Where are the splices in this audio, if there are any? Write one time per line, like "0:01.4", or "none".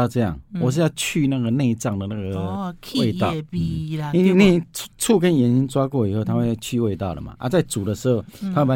0:04.9